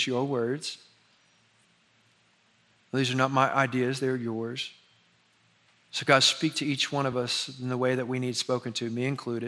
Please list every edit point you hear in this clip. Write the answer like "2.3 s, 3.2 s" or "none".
none